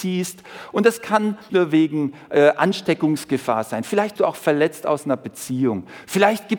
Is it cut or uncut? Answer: cut